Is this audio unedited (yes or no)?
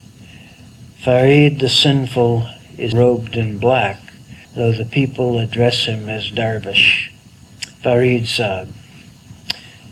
no